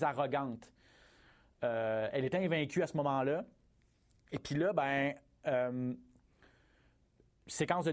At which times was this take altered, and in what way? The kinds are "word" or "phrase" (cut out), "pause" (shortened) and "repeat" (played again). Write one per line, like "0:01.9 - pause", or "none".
none